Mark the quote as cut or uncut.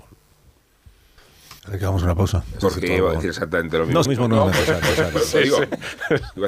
cut